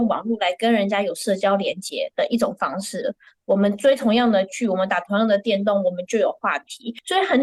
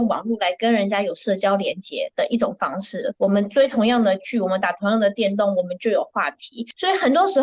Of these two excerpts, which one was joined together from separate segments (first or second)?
second